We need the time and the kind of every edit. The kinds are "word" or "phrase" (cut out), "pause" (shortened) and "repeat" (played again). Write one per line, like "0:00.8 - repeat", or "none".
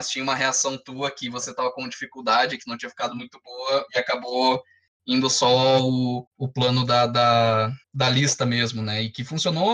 0:06.3 - pause
0:07.8 - pause